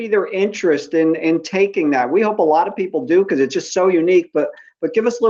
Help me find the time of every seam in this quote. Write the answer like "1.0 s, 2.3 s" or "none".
none